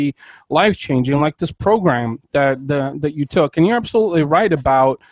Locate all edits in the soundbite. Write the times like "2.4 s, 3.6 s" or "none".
none